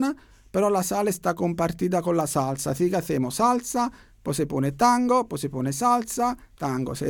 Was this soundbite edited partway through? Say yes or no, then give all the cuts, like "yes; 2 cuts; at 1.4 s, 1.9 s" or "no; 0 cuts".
no; 0 cuts